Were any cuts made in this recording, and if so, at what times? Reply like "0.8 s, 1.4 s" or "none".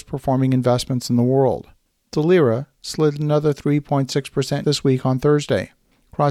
4.6 s

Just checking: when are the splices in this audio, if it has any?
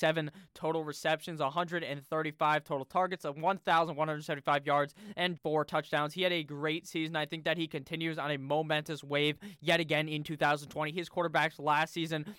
5.4 s

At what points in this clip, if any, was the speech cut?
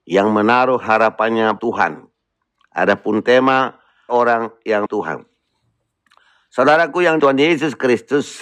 1.6 s, 4.1 s, 4.9 s, 7.2 s

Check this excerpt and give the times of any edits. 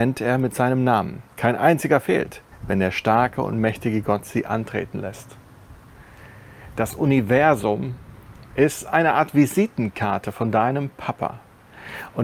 1.3 s, 2.5 s

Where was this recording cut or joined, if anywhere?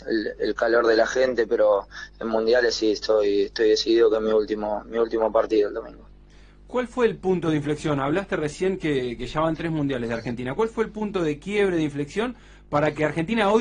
none

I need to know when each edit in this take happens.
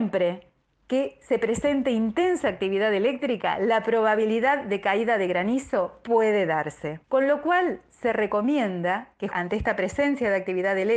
7.0 s, 9.3 s

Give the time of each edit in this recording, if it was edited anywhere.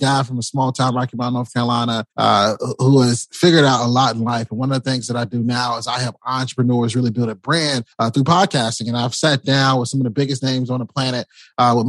2.1 s, 7.9 s

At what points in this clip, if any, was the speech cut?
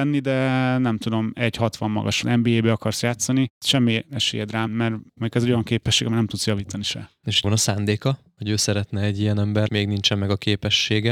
2.2 s, 4.7 s, 7.4 s, 9.7 s

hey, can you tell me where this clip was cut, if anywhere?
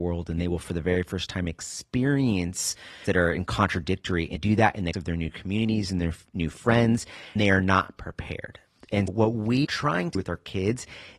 3.1 s, 4.4 s, 4.9 s, 7.4 s, 9.1 s, 9.6 s, 10.1 s

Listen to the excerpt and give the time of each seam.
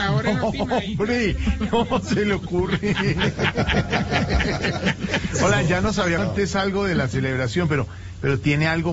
6.2 s

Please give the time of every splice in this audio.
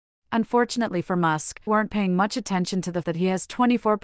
1.7 s, 3.0 s

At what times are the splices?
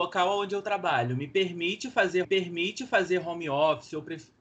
2.2 s

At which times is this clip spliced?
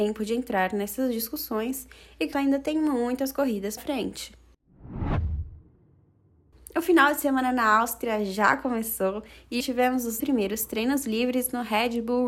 2.3 s, 3.8 s, 9.6 s, 10.2 s

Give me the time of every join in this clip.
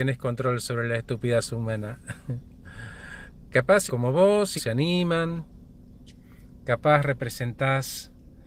3.9 s, 4.6 s

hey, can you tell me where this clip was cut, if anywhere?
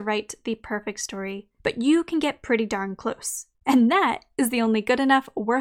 1.6 s, 3.5 s

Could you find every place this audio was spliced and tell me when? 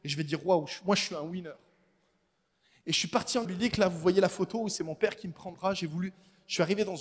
3.4 s, 5.5 s

